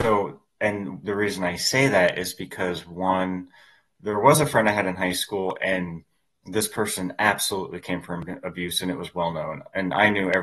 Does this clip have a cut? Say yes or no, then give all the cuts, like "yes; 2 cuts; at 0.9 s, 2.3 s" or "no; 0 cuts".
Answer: no; 0 cuts